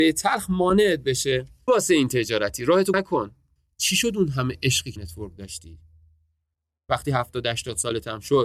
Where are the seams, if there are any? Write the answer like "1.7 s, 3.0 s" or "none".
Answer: 1.7 s, 2.9 s, 5.0 s